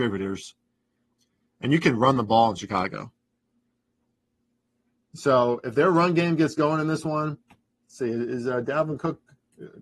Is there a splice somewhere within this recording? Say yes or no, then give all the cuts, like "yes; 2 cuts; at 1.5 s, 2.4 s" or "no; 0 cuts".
no; 0 cuts